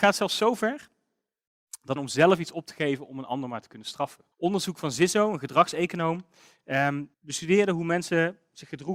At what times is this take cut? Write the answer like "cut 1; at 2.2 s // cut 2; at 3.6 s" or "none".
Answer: cut 1; at 2.0 s // cut 2; at 4.3 s // cut 3; at 7.1 s